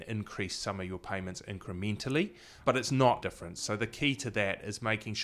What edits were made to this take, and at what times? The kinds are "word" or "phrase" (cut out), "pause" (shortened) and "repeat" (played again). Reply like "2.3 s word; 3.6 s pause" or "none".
2.6 s word; 3.2 s phrase